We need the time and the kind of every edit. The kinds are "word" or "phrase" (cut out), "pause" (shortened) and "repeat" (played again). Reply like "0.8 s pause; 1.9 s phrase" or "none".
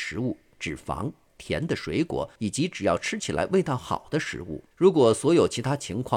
1.3 s word; 2.4 s pause; 4.7 s pause